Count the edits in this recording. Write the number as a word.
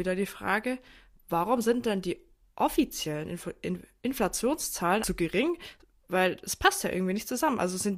one